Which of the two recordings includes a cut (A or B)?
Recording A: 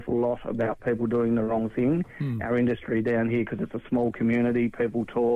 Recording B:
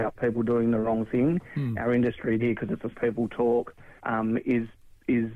B